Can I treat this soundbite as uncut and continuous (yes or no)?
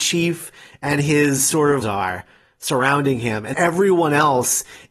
no